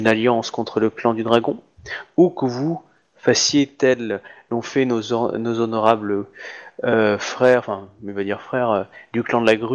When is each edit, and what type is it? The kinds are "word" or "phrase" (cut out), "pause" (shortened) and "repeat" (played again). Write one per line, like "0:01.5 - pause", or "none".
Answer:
none